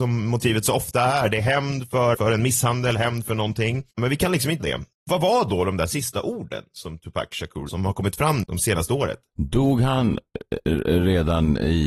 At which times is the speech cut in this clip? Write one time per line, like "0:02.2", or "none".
0:02.1
0:03.9
0:04.6
0:07.7
0:08.4